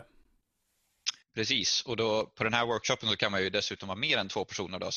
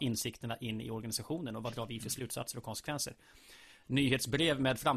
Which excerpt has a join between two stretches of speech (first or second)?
first